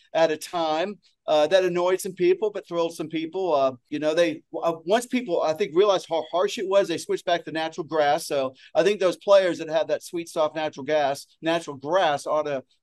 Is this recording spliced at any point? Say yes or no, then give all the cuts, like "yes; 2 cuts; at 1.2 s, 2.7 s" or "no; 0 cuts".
no; 0 cuts